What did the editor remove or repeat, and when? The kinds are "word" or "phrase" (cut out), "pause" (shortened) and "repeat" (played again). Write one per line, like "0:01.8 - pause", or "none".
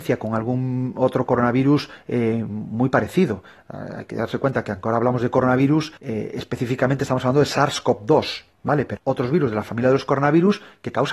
0:06.0 - pause
0:08.5 - pause
0:09.0 - word